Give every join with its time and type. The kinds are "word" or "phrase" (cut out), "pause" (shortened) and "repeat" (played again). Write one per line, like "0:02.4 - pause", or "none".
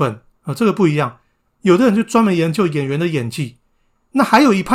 none